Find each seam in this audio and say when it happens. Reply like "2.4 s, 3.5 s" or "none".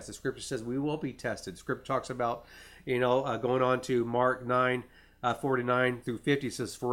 none